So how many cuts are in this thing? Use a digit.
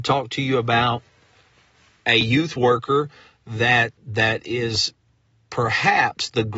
1